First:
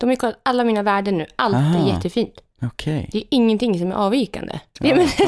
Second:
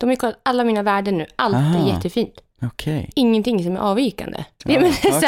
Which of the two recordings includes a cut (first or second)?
second